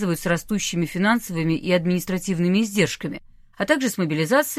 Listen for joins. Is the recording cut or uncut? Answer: uncut